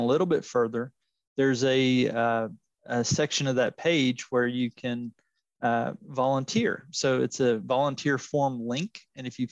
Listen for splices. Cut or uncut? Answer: uncut